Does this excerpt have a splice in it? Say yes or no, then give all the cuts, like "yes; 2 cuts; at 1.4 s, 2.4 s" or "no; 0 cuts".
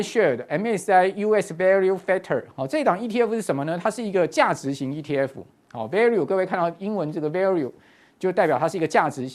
no; 0 cuts